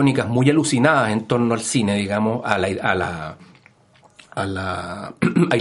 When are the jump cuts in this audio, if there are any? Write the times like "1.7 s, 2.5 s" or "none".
none